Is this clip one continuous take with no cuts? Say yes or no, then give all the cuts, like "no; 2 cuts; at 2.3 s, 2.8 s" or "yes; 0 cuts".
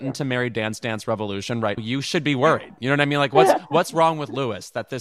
no; 1 cut; at 1.8 s